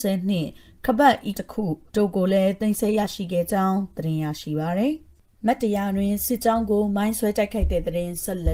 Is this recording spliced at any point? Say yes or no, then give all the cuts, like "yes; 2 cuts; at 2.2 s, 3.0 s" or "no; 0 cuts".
yes; 2 cuts; at 1.3 s, 1.9 s